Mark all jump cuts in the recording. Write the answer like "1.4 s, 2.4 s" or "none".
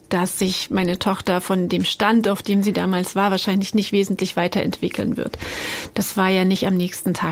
none